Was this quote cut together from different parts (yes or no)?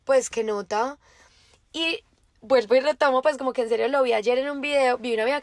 no